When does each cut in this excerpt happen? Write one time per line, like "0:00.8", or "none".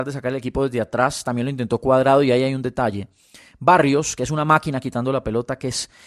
none